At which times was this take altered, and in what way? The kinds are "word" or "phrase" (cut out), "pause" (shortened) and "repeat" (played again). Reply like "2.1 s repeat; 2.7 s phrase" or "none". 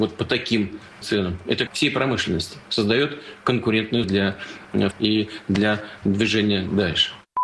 1.0 s word; 1.7 s phrase; 2.7 s pause; 4.0 s word; 4.9 s word

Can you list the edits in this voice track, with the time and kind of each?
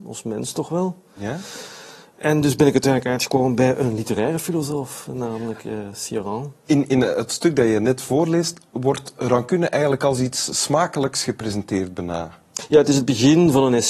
none

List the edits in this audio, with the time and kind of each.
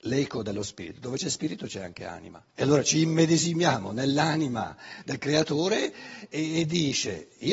2.5 s pause

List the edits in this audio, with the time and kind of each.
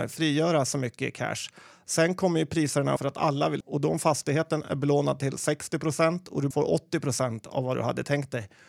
3.0 s phrase; 3.6 s word; 6.5 s word

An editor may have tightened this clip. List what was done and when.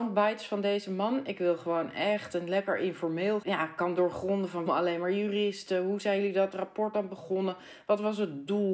3.4 s phrase; 4.7 s word

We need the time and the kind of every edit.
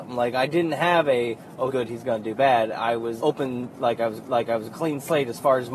1.7 s phrase; 3.2 s word; 4.2 s repeat

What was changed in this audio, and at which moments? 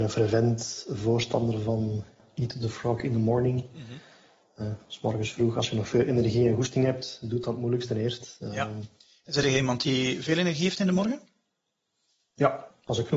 none

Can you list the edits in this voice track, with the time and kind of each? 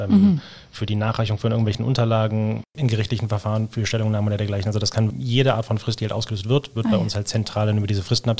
2.7 s pause; 5.1 s word

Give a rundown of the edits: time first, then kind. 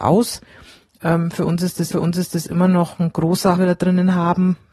1.9 s repeat; 3.6 s phrase

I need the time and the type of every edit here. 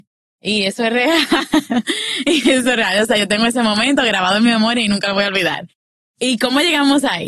none

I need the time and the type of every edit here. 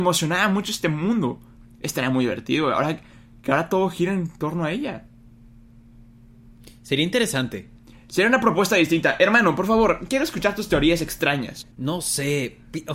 11.7 s pause

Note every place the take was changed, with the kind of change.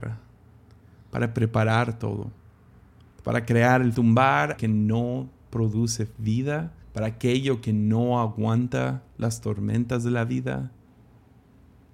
3.9 s phrase; 4.6 s word; 6.8 s pause

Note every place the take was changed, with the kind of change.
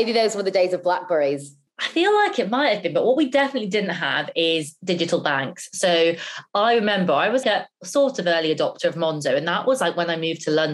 1.7 s pause; 7.4 s word

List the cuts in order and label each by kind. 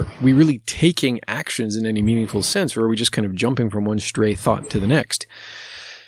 none

